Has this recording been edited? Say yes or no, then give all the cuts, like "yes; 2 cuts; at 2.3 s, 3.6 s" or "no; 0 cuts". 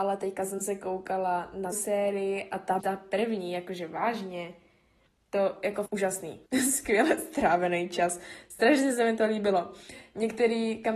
yes; 4 cuts; at 1.7 s, 2.8 s, 5.9 s, 6.5 s